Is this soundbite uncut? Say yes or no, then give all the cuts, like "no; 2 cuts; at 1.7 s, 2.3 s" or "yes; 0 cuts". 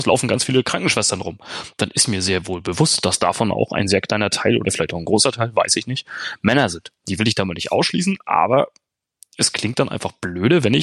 yes; 0 cuts